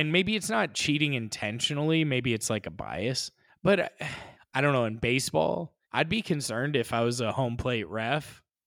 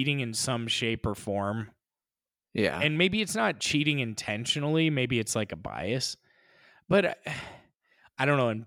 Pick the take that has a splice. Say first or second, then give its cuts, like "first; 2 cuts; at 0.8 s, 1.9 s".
first; 3 cuts; at 3.5 s, 4.3 s, 5.8 s